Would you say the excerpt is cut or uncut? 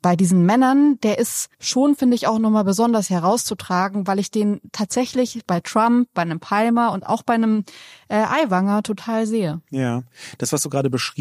cut